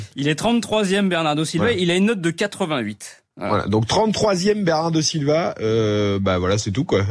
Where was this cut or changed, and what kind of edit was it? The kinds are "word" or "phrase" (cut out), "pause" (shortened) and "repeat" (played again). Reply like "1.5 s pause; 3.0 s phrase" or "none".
none